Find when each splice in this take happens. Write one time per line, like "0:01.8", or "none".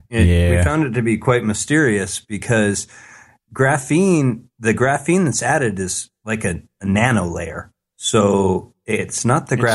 0:04.5